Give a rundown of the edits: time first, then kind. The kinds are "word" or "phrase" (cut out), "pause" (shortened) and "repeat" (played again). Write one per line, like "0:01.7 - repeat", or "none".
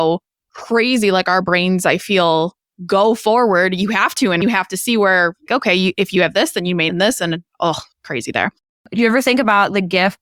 0:04.4 - phrase
0:05.5 - word
0:06.9 - phrase